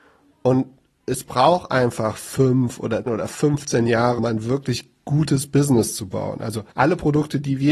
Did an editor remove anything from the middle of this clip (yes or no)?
yes